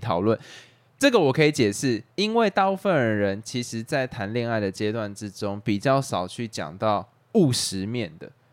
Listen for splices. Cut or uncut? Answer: cut